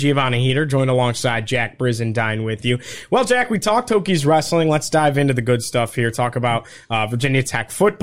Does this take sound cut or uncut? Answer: uncut